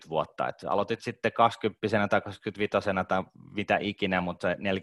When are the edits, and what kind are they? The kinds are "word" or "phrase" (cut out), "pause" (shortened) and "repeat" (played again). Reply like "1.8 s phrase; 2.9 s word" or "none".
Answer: none